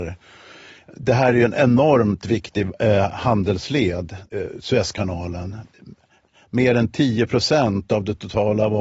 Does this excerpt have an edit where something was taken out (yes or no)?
no